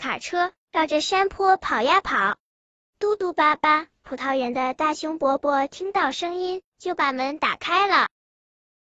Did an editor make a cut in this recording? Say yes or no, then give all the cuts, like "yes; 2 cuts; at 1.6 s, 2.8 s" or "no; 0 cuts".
yes; 1 cut; at 2.6 s